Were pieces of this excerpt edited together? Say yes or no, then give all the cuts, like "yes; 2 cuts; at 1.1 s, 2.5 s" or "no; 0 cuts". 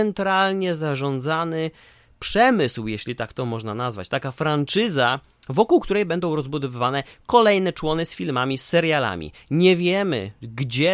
no; 0 cuts